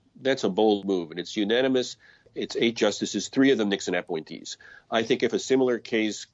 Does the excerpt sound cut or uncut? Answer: uncut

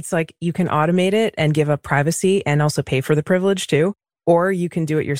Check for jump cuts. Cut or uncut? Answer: uncut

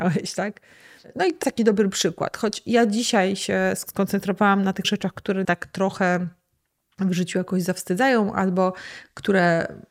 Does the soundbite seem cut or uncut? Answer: cut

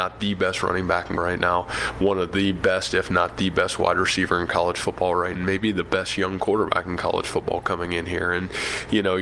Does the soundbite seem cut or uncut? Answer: cut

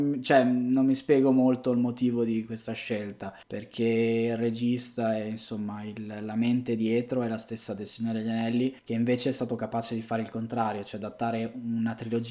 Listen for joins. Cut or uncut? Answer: cut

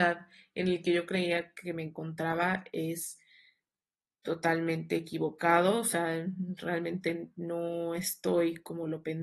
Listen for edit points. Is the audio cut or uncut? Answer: uncut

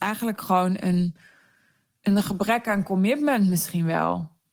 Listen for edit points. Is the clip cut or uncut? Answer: uncut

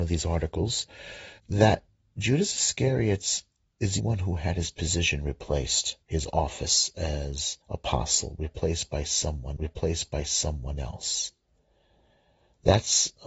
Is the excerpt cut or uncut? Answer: cut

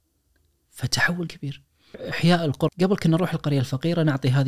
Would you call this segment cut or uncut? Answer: cut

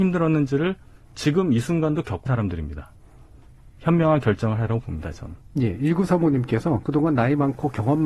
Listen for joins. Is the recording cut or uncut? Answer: cut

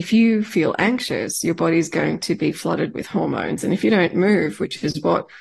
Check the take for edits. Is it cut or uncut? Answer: uncut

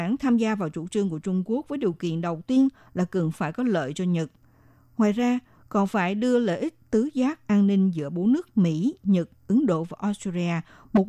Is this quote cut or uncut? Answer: uncut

